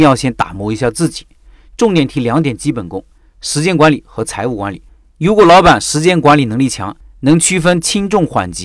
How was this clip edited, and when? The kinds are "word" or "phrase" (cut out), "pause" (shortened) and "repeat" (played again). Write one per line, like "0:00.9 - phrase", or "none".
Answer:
none